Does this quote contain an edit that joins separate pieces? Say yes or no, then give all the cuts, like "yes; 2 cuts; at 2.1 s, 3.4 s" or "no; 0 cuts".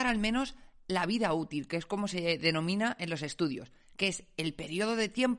no; 0 cuts